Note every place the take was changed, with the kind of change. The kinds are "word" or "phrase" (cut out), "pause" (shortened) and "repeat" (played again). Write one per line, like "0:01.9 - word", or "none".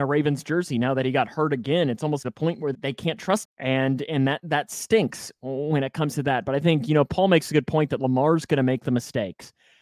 0:02.2 - phrase
0:02.7 - word
0:03.4 - word